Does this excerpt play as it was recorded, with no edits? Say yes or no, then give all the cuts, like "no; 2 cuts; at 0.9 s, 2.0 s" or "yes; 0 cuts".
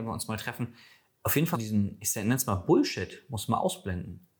no; 1 cut; at 1.5 s